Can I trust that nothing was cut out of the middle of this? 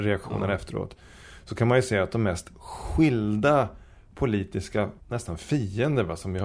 no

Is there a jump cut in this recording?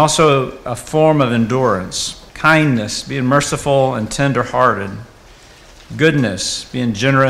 yes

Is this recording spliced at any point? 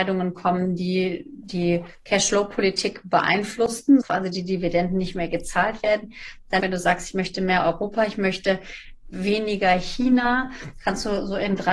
yes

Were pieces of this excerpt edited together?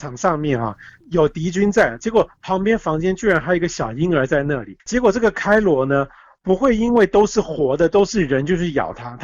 yes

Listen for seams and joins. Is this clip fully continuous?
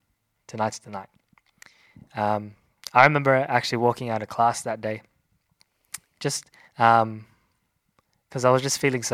no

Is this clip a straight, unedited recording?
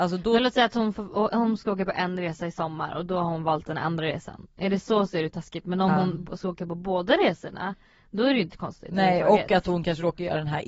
yes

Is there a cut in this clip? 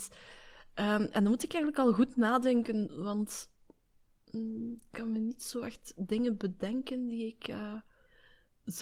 no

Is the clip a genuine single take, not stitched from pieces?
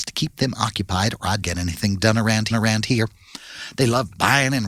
no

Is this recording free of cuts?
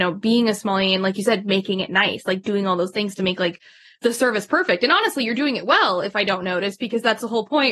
yes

